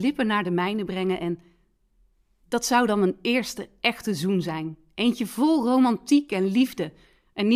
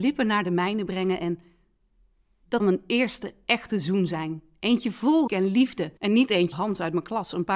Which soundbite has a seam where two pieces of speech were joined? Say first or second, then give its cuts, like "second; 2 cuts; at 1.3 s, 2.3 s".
second; 4 cuts; at 2.6 s, 5.3 s, 6.0 s, 6.5 s